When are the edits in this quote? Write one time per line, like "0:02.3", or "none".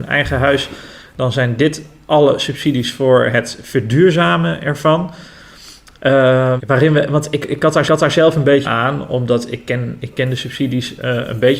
0:06.6
0:07.8
0:08.6